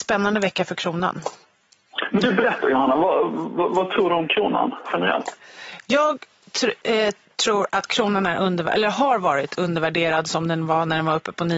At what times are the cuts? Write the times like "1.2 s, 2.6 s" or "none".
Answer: none